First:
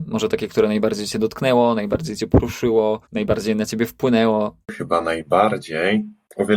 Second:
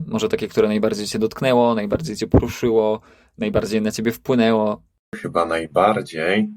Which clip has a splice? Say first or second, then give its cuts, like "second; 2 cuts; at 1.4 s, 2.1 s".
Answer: first; 2 cuts; at 3.0 s, 4.6 s